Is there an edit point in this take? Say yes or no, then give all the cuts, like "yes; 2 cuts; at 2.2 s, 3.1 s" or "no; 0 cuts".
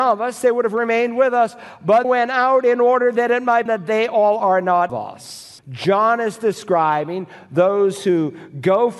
yes; 4 cuts; at 2.0 s, 3.7 s, 4.9 s, 5.6 s